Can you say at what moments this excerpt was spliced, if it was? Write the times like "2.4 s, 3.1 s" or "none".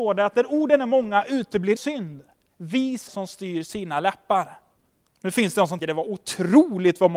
1.8 s, 3.1 s, 4.8 s, 5.8 s